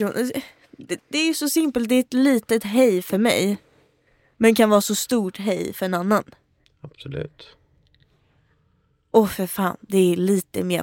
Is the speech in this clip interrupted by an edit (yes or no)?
no